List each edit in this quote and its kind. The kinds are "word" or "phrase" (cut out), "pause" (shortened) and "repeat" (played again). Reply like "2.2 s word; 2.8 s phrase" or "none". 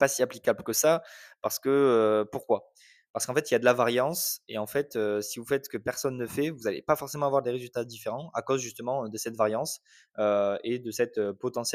none

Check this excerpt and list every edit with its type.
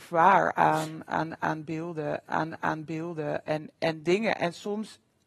2.3 s repeat

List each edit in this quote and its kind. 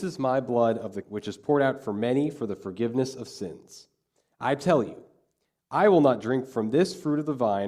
1.0 s word

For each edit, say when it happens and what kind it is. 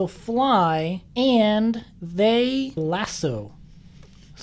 1.1 s pause; 2.8 s phrase

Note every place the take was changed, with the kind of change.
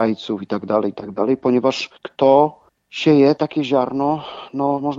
2.0 s pause; 3.4 s word

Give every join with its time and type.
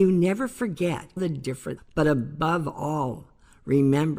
1.2 s word; 1.8 s word

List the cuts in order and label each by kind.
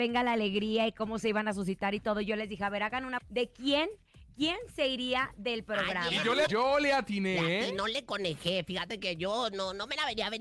3.2 s word; 6.5 s word

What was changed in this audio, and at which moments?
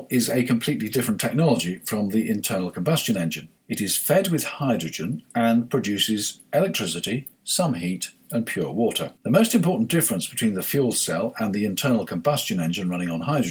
3.6 s pause; 7.3 s pause; 9.2 s pause

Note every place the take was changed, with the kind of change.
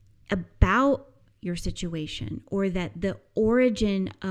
none

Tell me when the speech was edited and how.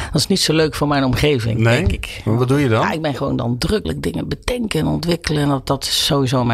3.8 s phrase

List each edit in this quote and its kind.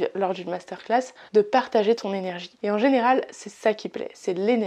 1.3 s pause; 2.6 s pause

